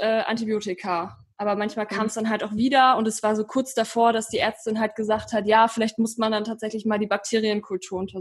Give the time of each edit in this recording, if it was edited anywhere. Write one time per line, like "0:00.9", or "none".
none